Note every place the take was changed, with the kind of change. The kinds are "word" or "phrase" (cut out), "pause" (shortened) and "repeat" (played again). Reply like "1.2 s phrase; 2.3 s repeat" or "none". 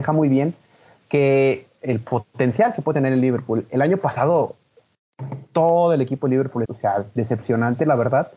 6.6 s word